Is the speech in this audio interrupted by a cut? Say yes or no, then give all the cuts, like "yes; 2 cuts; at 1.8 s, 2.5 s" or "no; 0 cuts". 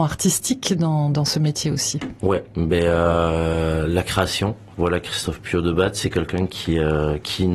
yes; 1 cut; at 4.7 s